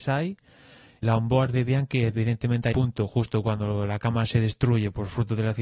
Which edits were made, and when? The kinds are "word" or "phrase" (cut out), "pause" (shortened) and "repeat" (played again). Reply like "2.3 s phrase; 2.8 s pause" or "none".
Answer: 1.0 s word; 2.7 s word

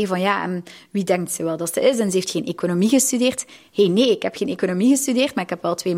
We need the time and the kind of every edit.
none

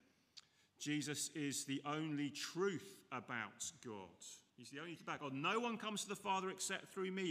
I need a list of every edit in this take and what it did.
4.5 s pause; 5.0 s word

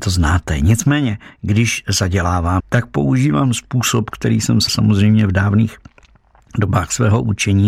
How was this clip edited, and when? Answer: 2.6 s word; 4.7 s word

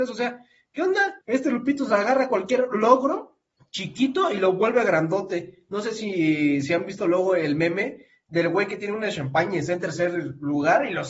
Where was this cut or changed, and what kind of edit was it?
1.2 s pause; 3.5 s pause

